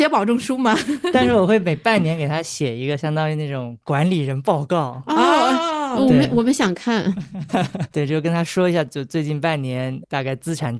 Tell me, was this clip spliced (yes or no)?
yes